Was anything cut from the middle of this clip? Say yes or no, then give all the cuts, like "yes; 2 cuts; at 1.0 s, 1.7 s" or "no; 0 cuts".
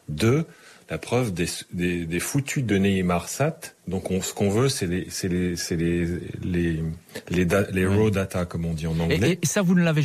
yes; 1 cut; at 3.8 s